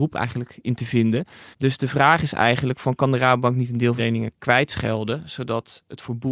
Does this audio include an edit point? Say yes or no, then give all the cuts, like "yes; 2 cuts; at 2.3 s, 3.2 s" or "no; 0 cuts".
yes; 2 cuts; at 1.5 s, 4.0 s